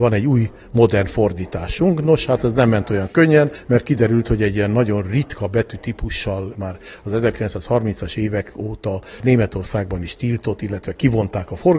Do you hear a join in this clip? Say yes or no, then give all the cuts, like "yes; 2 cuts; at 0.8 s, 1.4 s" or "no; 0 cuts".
yes; 1 cut; at 6.6 s